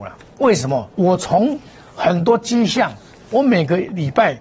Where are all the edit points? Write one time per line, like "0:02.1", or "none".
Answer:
0:00.9